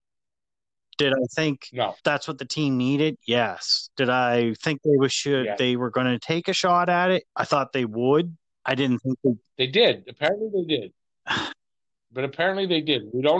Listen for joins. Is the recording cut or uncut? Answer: cut